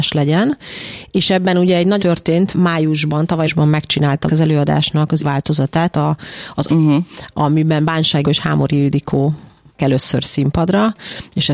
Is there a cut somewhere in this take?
yes; 9 cuts; at 2.0 s, 2.5 s, 3.5 s, 4.3 s, 5.2 s, 5.9 s, 6.6 s, 8.2 s, 9.8 s

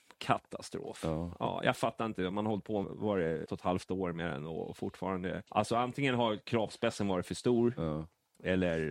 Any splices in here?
yes; 3 cuts; at 2.8 s, 3.5 s, 5.5 s

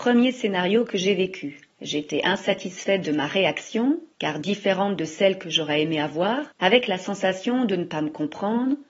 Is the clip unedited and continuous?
no; 3 cuts; at 1.7 s, 4.1 s, 6.5 s

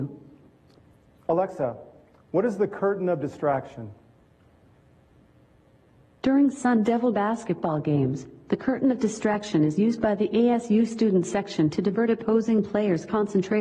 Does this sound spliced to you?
no; 0 cuts

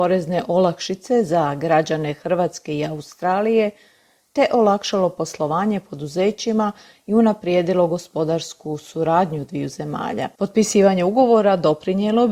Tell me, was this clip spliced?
no; 0 cuts

